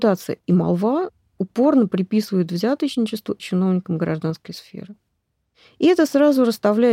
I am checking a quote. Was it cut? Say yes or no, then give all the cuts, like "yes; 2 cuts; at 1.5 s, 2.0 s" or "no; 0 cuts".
yes; 1 cut; at 3.4 s